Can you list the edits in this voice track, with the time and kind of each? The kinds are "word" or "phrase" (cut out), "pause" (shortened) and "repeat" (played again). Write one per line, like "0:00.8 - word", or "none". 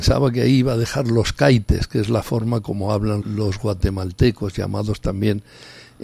0:03.2 - word